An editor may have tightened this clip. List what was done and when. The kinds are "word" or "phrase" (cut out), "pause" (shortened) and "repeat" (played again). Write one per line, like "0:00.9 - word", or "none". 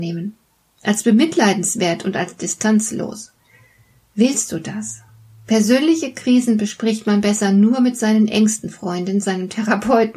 none